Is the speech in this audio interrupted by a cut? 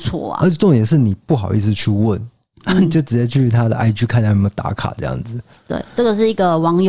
no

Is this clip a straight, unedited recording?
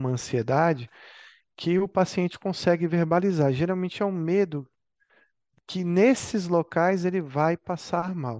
yes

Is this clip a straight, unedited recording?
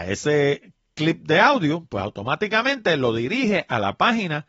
yes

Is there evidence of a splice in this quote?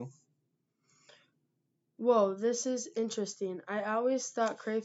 no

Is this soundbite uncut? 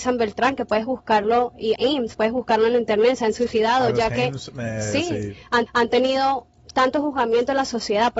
no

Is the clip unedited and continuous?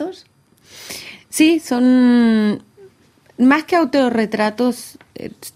yes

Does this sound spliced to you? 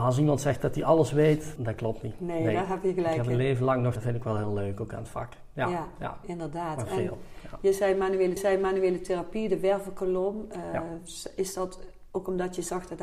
yes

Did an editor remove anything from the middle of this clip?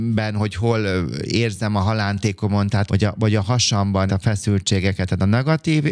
yes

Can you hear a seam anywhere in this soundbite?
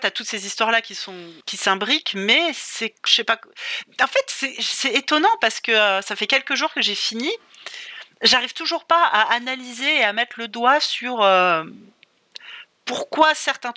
yes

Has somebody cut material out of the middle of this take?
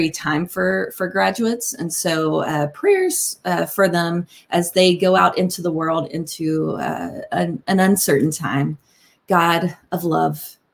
no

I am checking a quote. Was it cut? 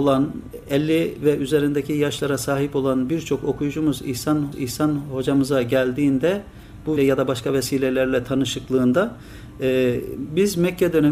yes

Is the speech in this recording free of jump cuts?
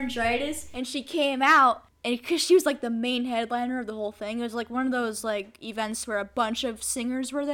yes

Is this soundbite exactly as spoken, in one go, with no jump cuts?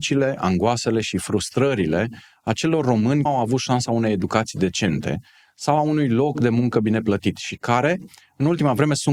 no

